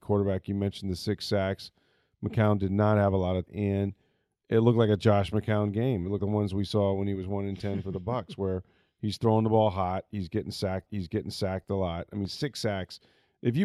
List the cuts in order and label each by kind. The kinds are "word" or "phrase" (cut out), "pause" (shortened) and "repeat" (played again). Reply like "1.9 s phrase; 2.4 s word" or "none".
3.5 s word; 6.2 s word; 10.9 s repeat